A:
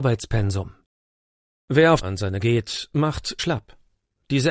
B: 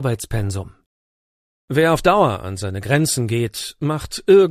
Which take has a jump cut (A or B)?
A